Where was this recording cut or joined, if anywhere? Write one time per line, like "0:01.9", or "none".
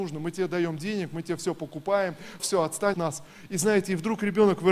0:02.4
0:02.9

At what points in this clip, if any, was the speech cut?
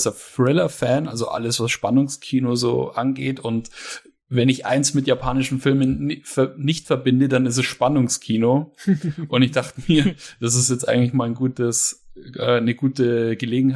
none

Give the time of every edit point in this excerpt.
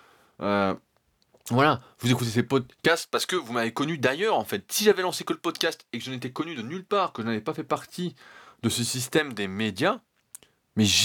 none

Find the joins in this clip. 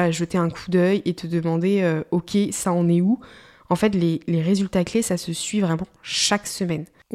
none

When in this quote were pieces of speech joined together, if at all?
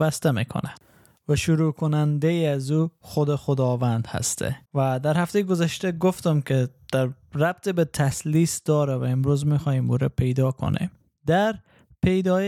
0:04.6
0:11.0

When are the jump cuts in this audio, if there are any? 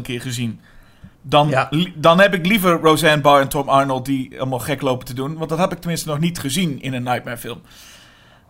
0:01.1

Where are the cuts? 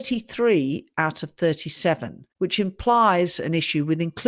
0:02.3

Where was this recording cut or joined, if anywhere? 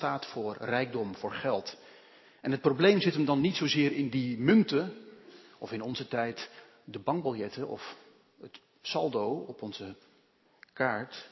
none

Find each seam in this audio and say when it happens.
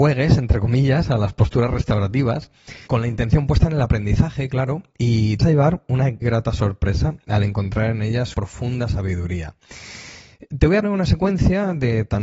0:02.9
0:05.4
0:06.2
0:08.3
0:10.8

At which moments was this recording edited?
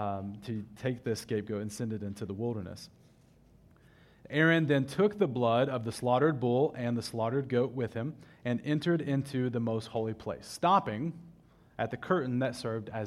none

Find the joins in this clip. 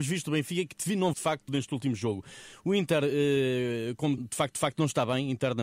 0:01.1
0:01.5
0:04.2
0:04.5

